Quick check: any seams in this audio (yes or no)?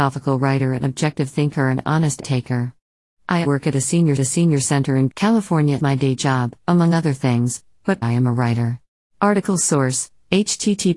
yes